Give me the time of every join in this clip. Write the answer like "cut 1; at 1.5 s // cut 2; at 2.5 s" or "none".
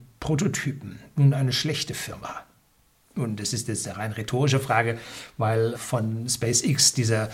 cut 1; at 5.7 s